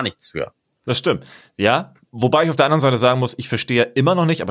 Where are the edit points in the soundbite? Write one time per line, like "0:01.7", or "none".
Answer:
0:02.0

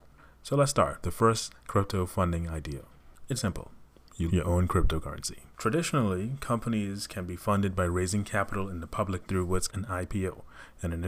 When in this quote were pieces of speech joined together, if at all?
0:01.0
0:03.4
0:04.3
0:05.5
0:09.2
0:09.7

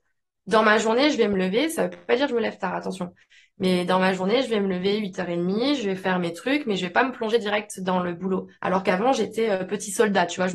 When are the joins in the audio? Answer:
none

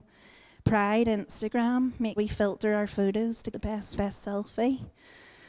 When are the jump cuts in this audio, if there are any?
0:02.2
0:03.5
0:04.0

